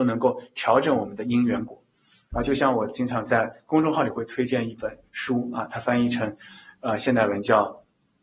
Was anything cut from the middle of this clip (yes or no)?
no